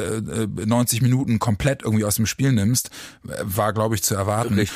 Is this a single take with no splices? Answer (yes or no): yes